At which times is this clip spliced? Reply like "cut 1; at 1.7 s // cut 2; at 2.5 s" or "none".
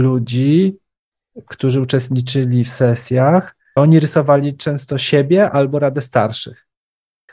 cut 1; at 3.8 s